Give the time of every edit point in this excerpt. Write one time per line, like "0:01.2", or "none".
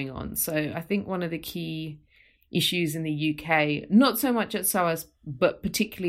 none